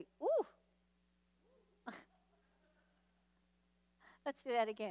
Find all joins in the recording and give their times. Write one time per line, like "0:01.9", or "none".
0:02.1

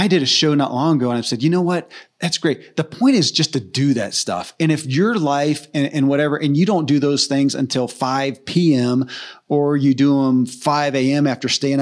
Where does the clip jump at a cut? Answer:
none

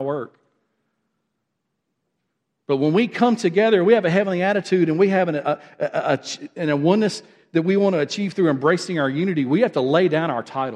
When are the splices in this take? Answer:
none

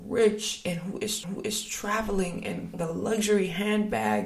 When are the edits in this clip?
0:01.2
0:02.7

